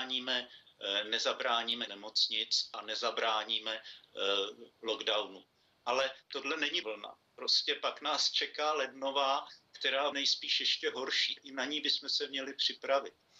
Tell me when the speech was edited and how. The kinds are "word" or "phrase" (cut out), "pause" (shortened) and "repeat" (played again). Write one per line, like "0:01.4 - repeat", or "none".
0:01.9 - word
0:06.8 - word
0:10.1 - word
0:11.4 - word